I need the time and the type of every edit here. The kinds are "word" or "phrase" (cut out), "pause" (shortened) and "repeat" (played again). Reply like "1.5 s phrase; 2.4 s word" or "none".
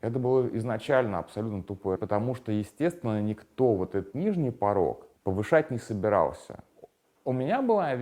2.0 s word; 4.1 s word; 5.2 s pause